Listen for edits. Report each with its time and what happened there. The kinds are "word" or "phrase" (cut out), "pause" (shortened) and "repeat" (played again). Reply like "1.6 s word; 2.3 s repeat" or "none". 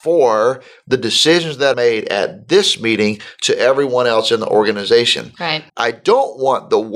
1.7 s word; 5.7 s pause